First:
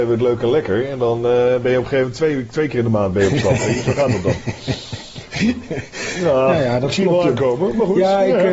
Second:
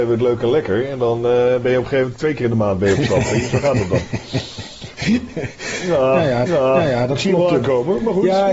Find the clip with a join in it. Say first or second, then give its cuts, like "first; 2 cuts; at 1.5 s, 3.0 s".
second; 2 cuts; at 2.1 s, 6.5 s